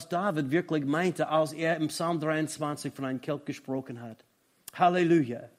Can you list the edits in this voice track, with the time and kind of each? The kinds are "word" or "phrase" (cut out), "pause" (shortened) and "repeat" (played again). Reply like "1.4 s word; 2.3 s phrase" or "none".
none